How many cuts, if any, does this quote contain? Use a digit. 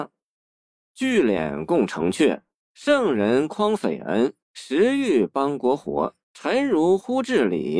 3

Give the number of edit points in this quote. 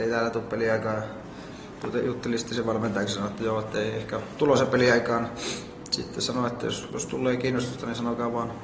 0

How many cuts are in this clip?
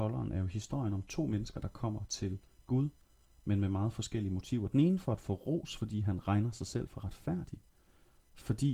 0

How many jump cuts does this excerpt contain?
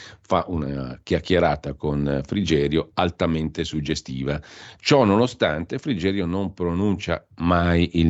0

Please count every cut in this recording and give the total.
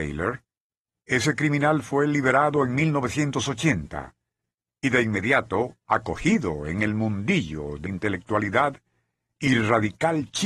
1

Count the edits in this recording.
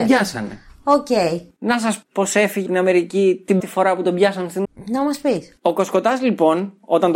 4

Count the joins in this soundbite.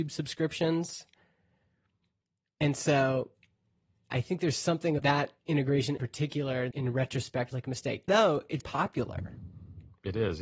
7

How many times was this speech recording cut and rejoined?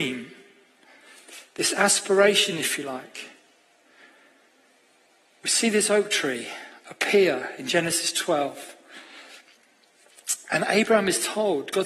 0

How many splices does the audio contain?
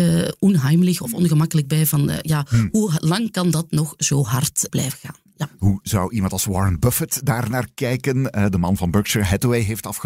1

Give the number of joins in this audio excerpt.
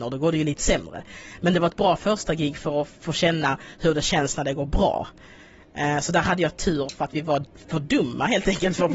0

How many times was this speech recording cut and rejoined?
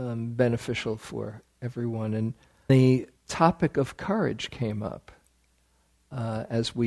2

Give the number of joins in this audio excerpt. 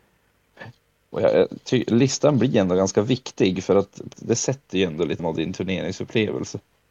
2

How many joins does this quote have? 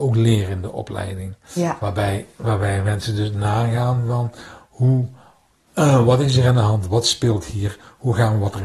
0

